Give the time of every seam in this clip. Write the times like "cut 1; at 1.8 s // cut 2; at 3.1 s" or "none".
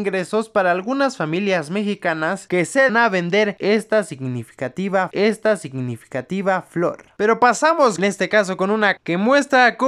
cut 1; at 2.9 s // cut 2; at 5.1 s // cut 3; at 8.0 s // cut 4; at 9.0 s